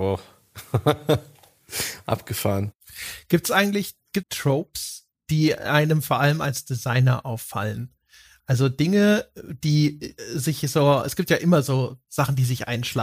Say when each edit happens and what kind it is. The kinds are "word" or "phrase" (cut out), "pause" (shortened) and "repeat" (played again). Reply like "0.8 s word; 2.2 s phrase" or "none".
4.2 s word